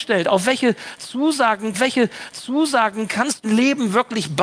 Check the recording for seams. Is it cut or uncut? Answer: cut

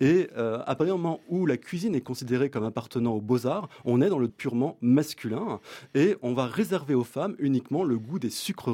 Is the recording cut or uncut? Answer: cut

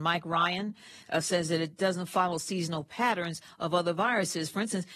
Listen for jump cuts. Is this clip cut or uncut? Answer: uncut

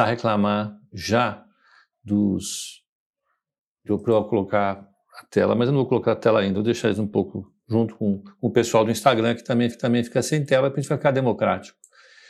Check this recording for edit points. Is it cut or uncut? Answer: cut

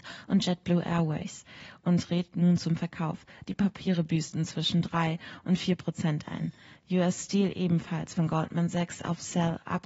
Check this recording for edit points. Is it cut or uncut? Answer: uncut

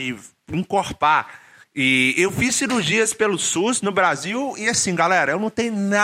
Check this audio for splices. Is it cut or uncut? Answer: cut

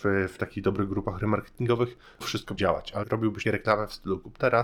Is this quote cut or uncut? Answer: cut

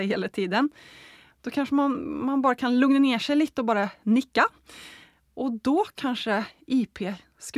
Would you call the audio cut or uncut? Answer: uncut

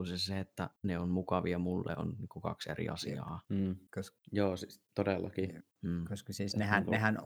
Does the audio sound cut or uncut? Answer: cut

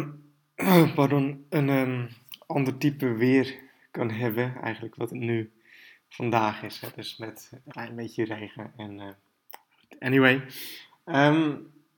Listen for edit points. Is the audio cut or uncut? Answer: cut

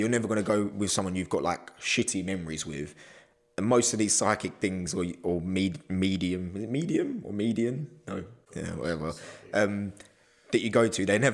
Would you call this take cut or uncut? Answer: uncut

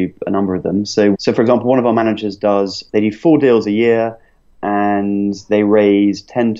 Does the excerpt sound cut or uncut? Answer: cut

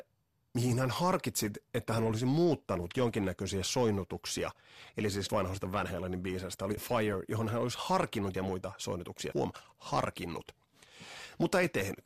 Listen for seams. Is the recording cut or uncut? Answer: cut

